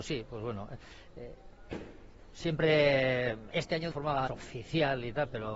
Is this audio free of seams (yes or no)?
no